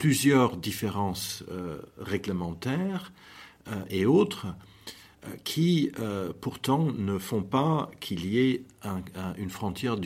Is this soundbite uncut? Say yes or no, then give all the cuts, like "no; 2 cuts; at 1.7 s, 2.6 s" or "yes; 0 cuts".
yes; 0 cuts